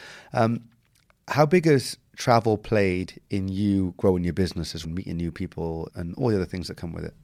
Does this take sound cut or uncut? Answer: cut